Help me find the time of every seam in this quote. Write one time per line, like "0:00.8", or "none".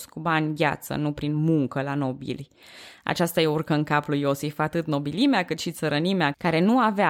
none

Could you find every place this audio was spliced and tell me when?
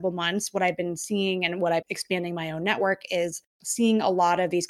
0:01.8

